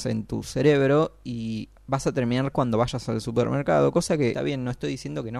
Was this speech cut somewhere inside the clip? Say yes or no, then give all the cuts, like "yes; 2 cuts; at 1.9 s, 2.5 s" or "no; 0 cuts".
yes; 3 cuts; at 1.8 s, 2.5 s, 4.3 s